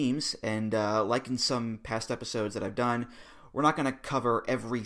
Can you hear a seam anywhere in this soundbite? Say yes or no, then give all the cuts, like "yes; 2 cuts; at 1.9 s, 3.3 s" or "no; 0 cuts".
no; 0 cuts